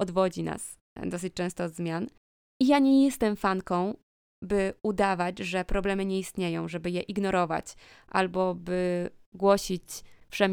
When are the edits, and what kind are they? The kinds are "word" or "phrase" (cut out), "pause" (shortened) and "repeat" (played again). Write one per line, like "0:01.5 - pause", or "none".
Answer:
none